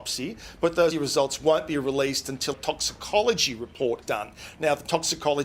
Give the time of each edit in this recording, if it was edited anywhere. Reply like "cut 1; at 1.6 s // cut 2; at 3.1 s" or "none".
cut 1; at 0.9 s // cut 2; at 2.5 s // cut 3; at 4.0 s